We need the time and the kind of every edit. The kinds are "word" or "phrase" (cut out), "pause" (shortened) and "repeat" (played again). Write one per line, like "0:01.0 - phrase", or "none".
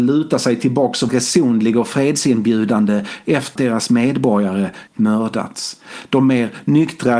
0:01.1 - word
0:03.6 - word
0:04.9 - word

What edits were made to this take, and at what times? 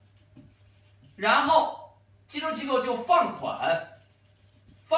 none

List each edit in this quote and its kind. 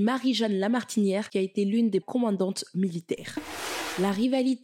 0:02.0 - word

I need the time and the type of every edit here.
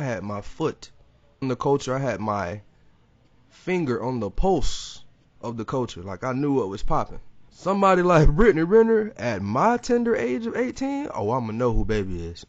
0:01.4 - word
0:05.2 - pause
0:07.5 - pause

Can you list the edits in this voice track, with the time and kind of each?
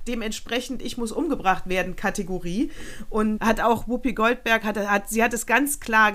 0:03.4 - word

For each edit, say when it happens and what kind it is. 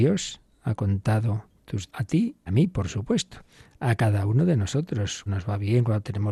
0:01.9 - word
0:02.5 - word
0:05.3 - word

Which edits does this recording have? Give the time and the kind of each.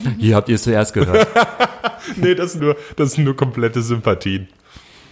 0:02.6 - word

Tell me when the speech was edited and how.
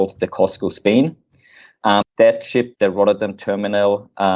0:02.0 - word
0:02.7 - word

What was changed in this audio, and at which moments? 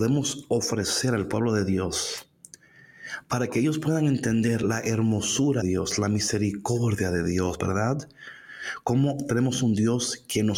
0:05.6 - word

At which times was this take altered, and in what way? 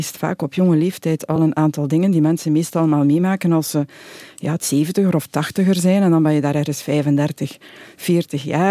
none

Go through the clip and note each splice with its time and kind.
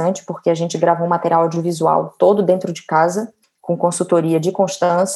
0:03.4 - pause

